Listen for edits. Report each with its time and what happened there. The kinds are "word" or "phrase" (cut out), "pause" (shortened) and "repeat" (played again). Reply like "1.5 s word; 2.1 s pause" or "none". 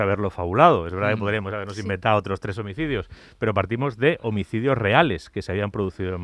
none

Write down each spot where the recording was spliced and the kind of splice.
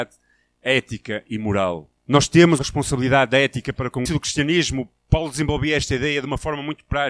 2.0 s pause; 2.6 s word; 4.1 s phrase

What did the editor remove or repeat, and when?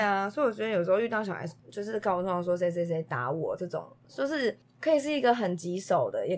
1.6 s pause

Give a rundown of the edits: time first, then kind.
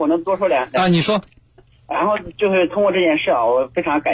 1.6 s word

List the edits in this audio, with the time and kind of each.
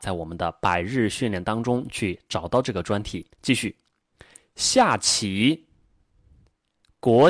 3.3 s pause

